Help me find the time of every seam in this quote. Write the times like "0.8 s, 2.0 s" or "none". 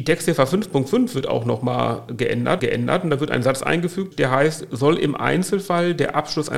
2.6 s

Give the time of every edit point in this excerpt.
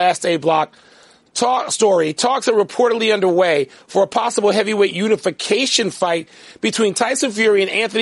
none

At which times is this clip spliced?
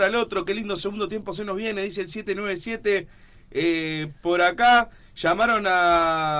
none

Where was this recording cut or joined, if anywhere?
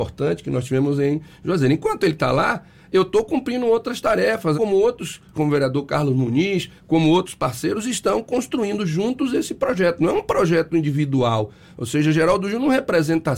4.5 s, 5.3 s, 6.8 s

